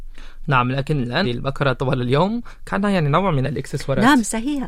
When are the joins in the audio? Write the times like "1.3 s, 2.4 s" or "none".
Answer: 1.2 s